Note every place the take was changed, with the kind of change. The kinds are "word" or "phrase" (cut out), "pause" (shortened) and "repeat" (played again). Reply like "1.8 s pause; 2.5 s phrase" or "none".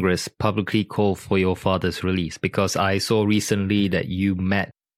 none